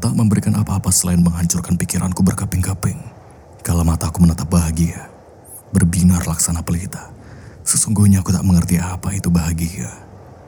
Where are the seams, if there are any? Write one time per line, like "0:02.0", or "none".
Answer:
0:03.4
0:07.5

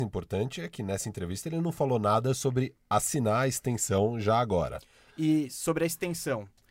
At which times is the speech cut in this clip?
none

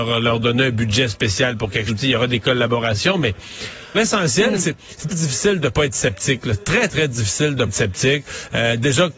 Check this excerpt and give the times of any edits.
0:01.9
0:03.9
0:05.1
0:06.9
0:07.7

